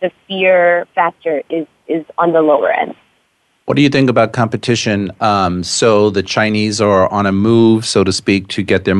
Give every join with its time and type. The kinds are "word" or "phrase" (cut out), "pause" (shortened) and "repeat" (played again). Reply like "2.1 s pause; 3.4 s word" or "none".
none